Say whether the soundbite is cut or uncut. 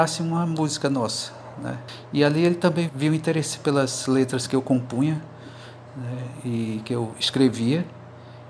cut